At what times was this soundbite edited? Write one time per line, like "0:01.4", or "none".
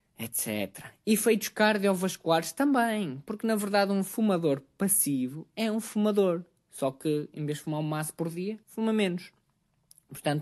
0:08.6